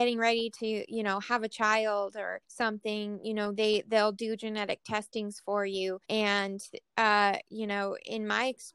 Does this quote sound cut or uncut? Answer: cut